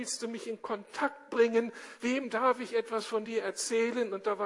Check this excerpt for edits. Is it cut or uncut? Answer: uncut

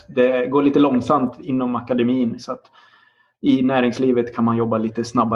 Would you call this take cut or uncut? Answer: uncut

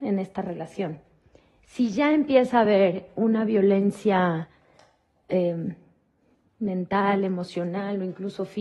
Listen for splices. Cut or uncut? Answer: uncut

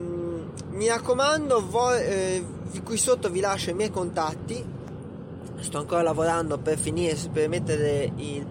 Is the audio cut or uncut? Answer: uncut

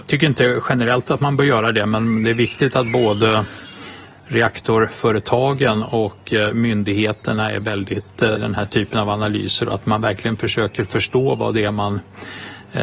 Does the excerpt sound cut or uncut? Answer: cut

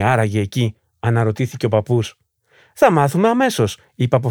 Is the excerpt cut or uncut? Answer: uncut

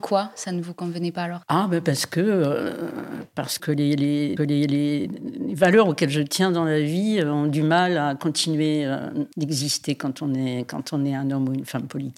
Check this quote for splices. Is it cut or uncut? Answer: cut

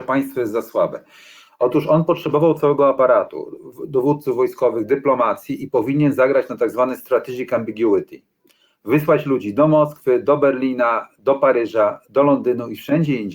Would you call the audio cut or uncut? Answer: uncut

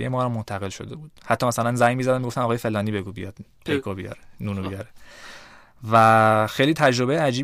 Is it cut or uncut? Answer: uncut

